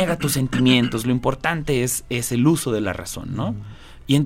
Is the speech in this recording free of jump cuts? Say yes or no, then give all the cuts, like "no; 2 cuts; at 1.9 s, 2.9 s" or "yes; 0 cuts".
yes; 0 cuts